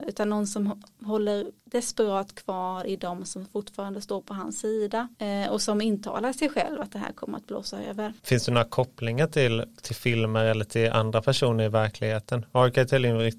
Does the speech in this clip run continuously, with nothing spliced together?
no; 3 cuts; at 1.6 s, 5.1 s, 8.2 s

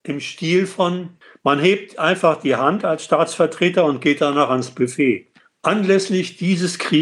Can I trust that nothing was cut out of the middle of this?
yes; 0 cuts

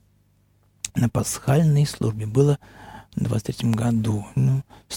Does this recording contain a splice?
no; 0 cuts

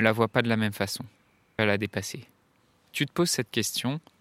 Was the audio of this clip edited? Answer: yes; 2 cuts; at 1.6 s, 2.9 s

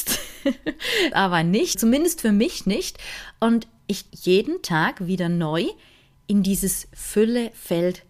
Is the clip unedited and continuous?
no; 3 cuts; at 1.1 s, 1.7 s, 4.1 s

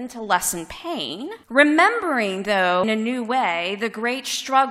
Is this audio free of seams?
no; 2 cuts; at 1.4 s, 2.8 s

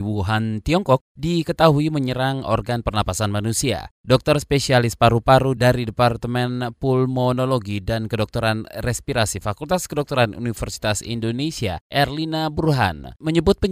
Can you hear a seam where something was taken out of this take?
no; 0 cuts

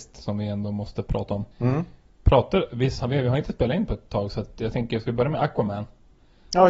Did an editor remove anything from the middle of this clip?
yes; 1 cut; at 1.5 s

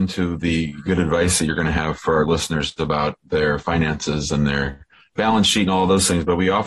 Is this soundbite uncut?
yes; 0 cuts

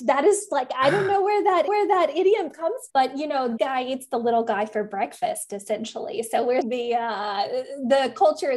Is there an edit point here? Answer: yes; 4 cuts; at 1.7 s, 2.9 s, 3.6 s, 6.6 s

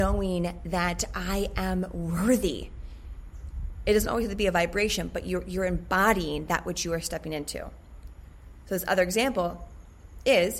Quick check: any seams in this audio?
no; 0 cuts

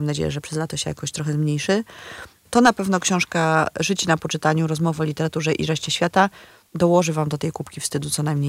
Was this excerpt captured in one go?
yes; 0 cuts

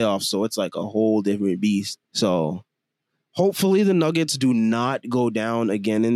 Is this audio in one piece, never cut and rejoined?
no; 1 cut; at 2.0 s

